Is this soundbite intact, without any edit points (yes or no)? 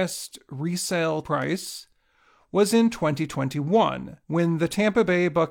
no